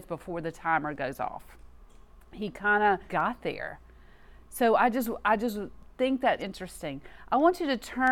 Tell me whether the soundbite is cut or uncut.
cut